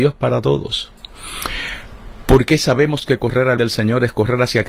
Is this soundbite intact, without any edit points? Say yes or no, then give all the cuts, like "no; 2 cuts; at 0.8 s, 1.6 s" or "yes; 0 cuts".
no; 1 cut; at 3.6 s